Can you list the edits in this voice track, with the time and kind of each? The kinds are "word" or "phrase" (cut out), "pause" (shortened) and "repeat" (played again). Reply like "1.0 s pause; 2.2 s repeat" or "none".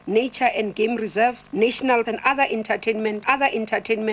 2.0 s word; 3.2 s repeat

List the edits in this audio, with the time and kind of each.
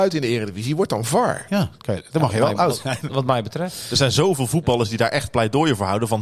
3.1 s word

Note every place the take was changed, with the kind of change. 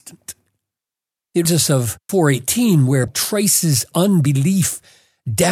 1.4 s word; 2.1 s word; 3.1 s word

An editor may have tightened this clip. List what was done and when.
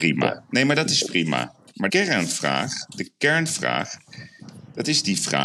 1.9 s word

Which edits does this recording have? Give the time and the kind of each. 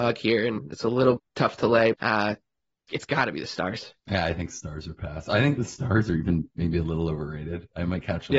1.2 s word; 1.9 s word; 2.9 s word; 4.0 s pause

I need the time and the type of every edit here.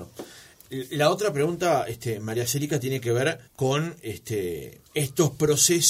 3.5 s pause; 4.9 s pause

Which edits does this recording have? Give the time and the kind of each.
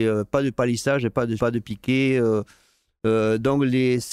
1.4 s word

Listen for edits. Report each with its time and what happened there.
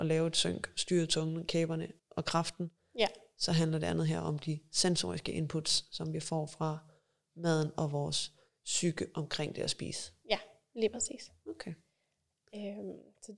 2.0 s pause

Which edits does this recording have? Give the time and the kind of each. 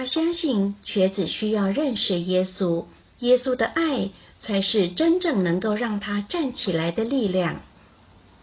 3.0 s pause

